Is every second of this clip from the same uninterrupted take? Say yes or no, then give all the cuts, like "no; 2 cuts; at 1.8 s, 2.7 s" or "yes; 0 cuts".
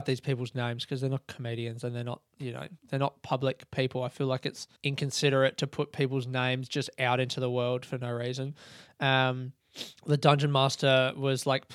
no; 3 cuts; at 2.8 s, 4.8 s, 10.0 s